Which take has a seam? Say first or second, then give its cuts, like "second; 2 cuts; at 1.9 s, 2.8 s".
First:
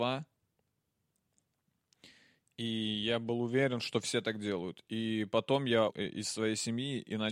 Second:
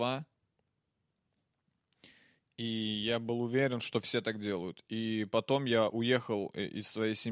first; 1 cut; at 5.9 s